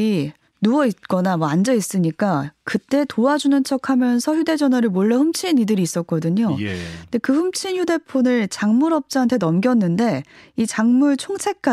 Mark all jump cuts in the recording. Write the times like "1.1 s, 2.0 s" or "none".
none

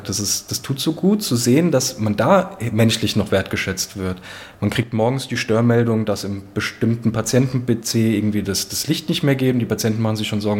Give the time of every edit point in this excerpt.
none

